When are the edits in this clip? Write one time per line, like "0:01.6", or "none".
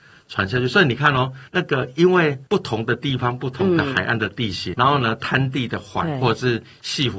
0:01.5
0:02.5
0:04.7